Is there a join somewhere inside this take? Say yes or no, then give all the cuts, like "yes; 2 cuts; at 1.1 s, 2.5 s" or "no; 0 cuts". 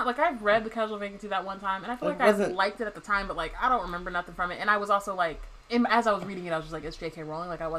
yes; 1 cut; at 5.6 s